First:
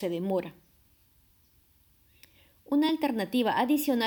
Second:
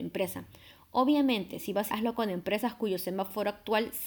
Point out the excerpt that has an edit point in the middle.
second; 1 cut; at 1.9 s

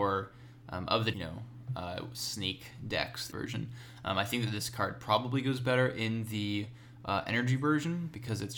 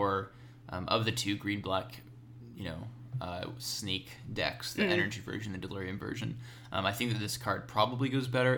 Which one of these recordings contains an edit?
first; 2 cuts; at 1.1 s, 3.3 s

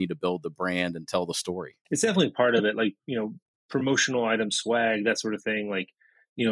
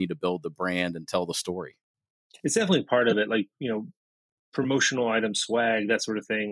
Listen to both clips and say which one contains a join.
first; 2 cuts; at 1.8 s, 3.4 s

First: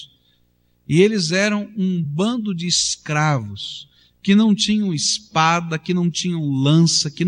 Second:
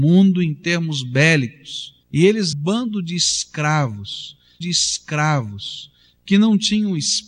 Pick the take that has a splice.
second; 3 cuts; at 2.0 s, 2.5 s, 4.6 s

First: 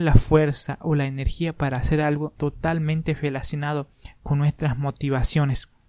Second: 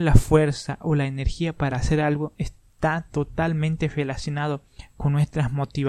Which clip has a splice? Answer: first; 1 cut; at 2.3 s

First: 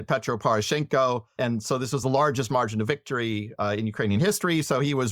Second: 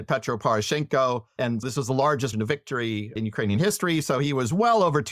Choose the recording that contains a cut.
second; 3 cuts; at 1.6 s, 2.3 s, 3.2 s

